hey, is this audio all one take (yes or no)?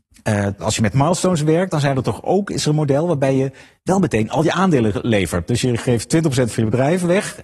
yes